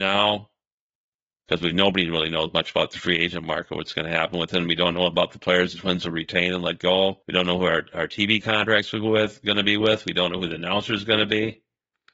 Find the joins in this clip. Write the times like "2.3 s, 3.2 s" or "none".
7.2 s